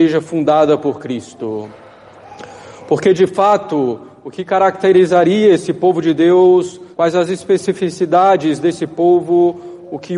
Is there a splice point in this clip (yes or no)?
yes